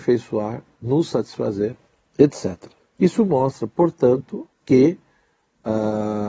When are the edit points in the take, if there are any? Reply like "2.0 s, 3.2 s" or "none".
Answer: 2.8 s, 4.5 s

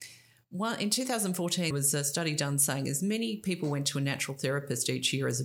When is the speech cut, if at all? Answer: 1.7 s

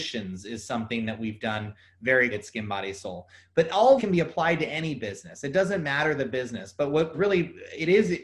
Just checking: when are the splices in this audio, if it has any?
2.3 s, 4.0 s, 7.1 s

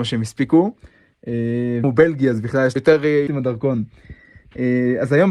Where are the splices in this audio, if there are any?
1.8 s, 2.8 s, 3.3 s

